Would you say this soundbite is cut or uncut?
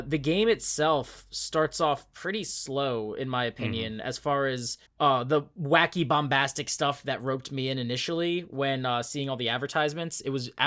cut